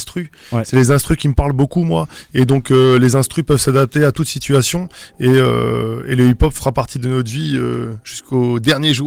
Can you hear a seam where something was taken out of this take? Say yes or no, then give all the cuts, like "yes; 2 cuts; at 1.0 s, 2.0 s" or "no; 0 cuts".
no; 0 cuts